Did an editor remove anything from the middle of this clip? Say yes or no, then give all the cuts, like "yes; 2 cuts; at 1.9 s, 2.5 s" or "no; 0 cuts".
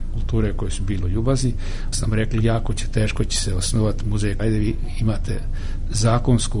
yes; 3 cuts; at 1.0 s, 1.9 s, 4.4 s